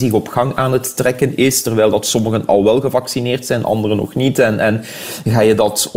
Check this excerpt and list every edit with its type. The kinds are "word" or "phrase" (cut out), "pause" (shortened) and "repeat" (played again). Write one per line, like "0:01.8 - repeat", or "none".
none